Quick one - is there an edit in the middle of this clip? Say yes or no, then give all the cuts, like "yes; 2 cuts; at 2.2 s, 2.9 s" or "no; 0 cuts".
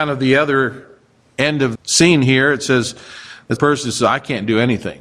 yes; 2 cuts; at 1.7 s, 3.6 s